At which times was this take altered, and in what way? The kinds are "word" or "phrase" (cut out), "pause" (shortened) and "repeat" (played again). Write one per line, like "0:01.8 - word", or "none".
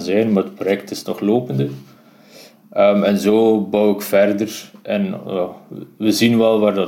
none